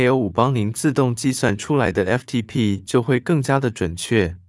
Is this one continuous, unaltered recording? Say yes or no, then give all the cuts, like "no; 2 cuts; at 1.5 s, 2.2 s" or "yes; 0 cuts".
yes; 0 cuts